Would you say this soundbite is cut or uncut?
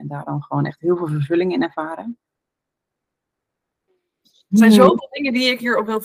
uncut